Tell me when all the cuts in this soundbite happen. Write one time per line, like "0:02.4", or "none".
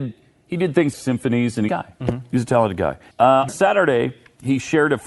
0:00.9
0:01.7
0:03.1
0:03.5